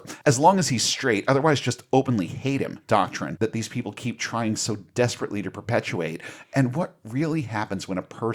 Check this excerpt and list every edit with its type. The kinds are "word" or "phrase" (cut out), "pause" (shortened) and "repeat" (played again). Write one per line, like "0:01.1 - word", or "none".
0:02.8 - pause

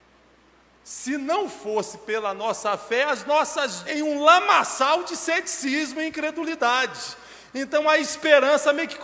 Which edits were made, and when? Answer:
0:03.8 - phrase

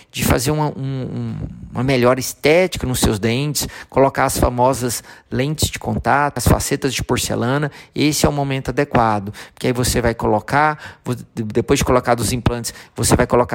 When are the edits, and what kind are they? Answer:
0:06.4 - word

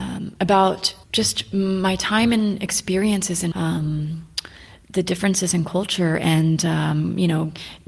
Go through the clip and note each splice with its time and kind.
0:01.0 - pause
0:03.5 - word

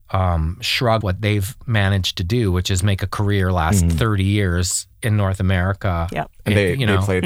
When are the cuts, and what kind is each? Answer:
0:01.0 - word
0:04.9 - pause

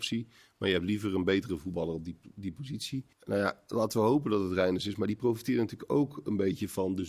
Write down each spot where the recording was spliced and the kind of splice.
0:03.1 - pause

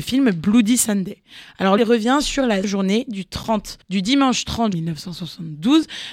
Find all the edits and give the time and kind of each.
0:01.8 - word
0:02.6 - word
0:03.8 - pause
0:04.7 - word

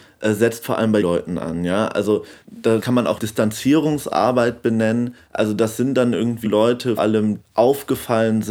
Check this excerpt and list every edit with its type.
0:01.0 - word
0:02.8 - word
0:03.2 - word
0:06.4 - word
0:07.0 - word
0:07.4 - word

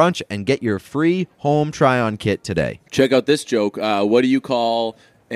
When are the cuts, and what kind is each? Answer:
0:02.9 - pause

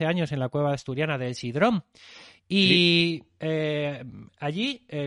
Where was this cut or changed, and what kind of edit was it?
none

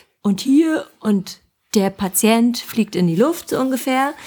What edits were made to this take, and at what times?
none

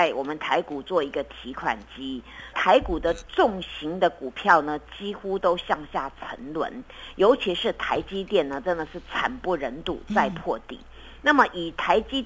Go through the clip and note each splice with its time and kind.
0:02.5 - phrase

